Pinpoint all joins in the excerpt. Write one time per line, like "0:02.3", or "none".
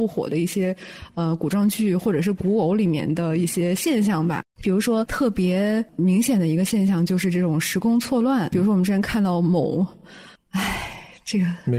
0:04.5
0:08.5
0:10.3